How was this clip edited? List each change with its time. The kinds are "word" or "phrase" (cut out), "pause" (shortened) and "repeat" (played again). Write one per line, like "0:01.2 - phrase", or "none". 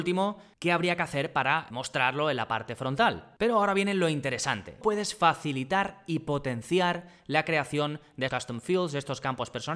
0:01.7 - word
0:04.8 - word
0:08.3 - word